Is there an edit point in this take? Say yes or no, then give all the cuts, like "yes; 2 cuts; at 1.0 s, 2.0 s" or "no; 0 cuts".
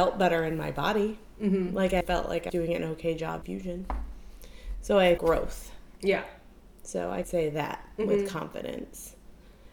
yes; 5 cuts; at 2.0 s, 2.5 s, 3.4 s, 5.2 s, 7.2 s